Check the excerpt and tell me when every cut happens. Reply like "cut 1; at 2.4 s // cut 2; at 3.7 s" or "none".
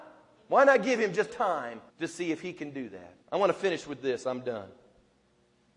cut 1; at 1.3 s // cut 2; at 1.9 s // cut 3; at 3.2 s